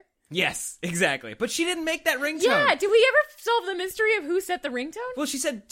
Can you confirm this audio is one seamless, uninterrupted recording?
yes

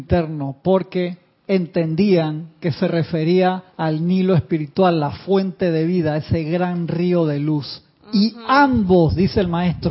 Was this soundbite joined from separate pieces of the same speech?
yes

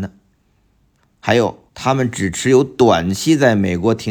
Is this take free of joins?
no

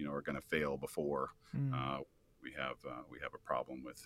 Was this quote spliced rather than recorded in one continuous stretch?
no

